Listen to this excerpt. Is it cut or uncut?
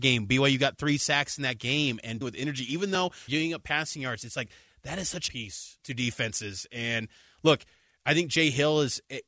cut